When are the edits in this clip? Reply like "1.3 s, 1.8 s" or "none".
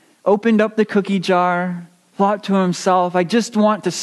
none